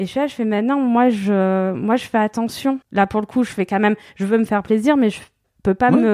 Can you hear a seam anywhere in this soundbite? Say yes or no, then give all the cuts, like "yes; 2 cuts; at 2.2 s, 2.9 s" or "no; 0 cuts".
yes; 1 cut; at 2.8 s